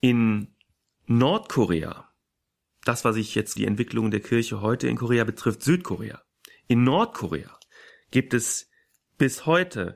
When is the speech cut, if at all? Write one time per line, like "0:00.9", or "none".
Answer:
0:03.6

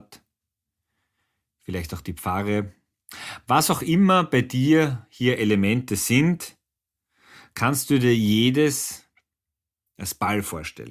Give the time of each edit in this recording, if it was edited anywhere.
none

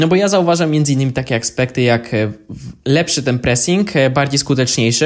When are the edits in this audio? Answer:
none

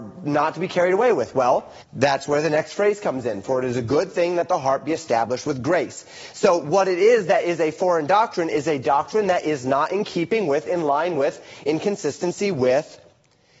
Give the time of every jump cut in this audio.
0:01.8

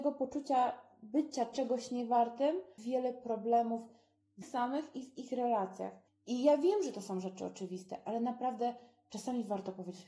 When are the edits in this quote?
0:02.8
0:04.4
0:06.1

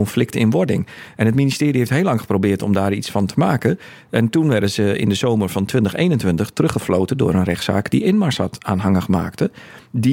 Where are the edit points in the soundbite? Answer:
none

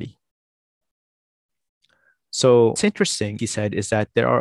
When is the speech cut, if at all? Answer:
0:02.8
0:03.4

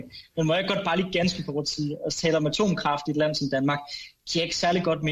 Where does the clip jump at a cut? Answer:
none

